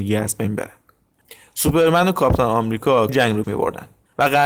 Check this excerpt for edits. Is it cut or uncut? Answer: cut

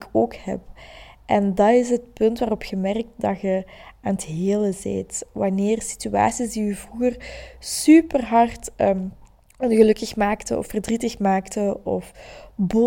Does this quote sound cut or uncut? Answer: uncut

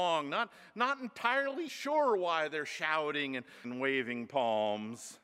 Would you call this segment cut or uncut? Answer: cut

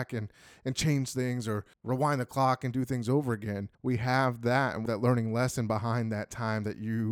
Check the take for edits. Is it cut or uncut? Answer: cut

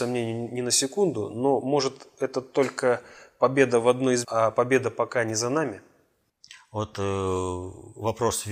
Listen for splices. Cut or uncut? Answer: cut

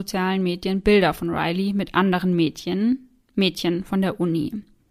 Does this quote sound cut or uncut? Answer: uncut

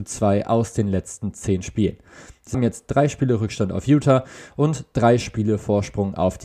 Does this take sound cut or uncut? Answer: cut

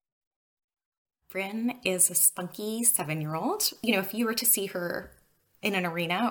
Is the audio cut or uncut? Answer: uncut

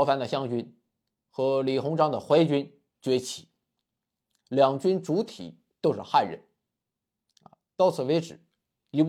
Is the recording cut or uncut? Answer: uncut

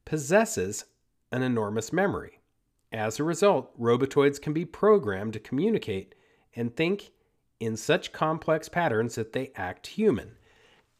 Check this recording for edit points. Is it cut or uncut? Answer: uncut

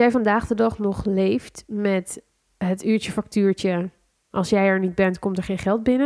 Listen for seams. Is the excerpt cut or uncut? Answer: uncut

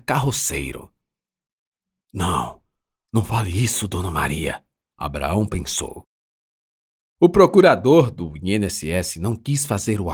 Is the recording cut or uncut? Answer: uncut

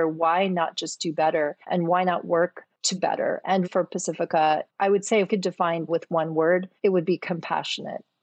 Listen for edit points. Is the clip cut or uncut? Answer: cut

